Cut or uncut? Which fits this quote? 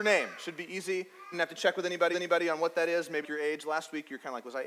cut